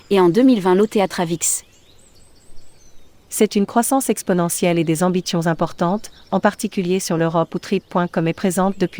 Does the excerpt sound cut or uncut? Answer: uncut